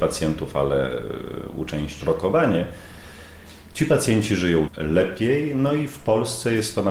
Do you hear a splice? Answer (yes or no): yes